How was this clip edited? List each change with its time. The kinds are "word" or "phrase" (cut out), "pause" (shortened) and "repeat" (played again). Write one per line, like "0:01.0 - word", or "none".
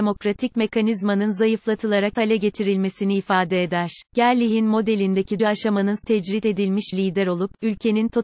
0:02.1 - word
0:04.1 - pause
0:05.4 - word
0:06.0 - word
0:06.9 - word